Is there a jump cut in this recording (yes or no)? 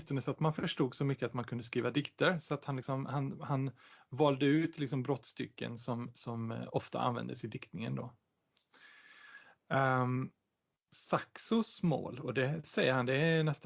no